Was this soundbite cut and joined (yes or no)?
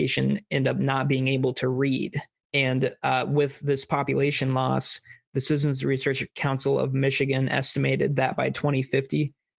no